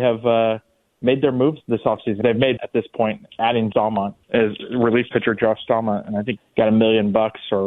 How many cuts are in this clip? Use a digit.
6